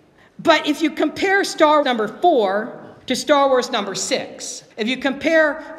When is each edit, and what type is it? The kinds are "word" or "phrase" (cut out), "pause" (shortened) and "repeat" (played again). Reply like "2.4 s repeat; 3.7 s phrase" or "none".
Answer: 1.8 s word; 3.0 s pause; 4.7 s pause